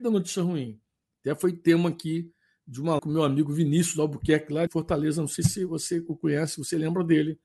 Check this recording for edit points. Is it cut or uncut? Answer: cut